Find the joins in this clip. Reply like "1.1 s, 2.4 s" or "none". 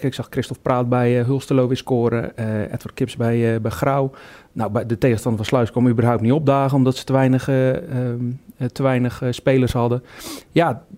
none